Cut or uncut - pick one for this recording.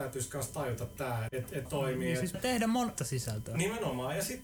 cut